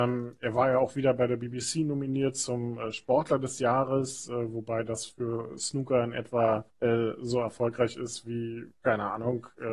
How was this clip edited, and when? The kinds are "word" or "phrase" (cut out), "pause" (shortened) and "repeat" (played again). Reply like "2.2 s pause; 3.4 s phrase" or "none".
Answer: 6.7 s pause; 8.7 s pause